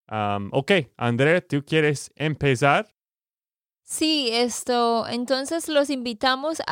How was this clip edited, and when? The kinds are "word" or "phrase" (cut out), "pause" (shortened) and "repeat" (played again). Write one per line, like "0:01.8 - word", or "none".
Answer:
none